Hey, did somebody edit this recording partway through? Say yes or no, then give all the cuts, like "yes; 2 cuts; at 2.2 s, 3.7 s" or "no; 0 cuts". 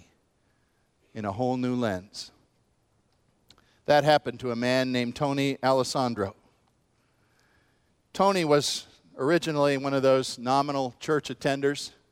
no; 0 cuts